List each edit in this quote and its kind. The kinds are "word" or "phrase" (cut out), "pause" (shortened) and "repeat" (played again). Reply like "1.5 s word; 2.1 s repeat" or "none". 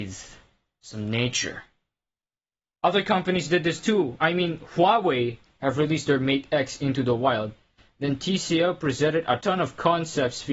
9.4 s word